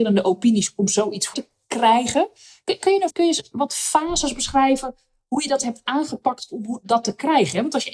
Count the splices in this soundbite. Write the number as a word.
two